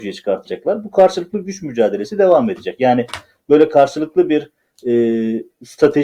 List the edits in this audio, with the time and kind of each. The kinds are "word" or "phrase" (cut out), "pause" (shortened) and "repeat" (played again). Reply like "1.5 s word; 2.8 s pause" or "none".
none